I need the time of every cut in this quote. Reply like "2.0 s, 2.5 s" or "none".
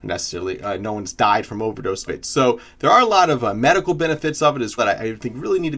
2.1 s, 4.8 s